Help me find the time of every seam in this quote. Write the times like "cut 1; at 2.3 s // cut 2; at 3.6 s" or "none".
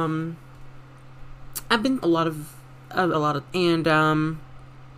cut 1; at 2.0 s // cut 2; at 3.1 s // cut 3; at 3.5 s